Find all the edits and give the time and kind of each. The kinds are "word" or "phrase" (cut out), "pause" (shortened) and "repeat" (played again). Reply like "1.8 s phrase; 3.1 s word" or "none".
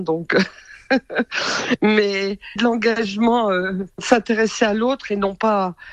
2.6 s word; 3.9 s pause